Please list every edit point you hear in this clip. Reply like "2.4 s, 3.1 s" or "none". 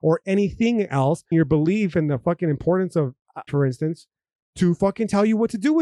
1.3 s, 3.5 s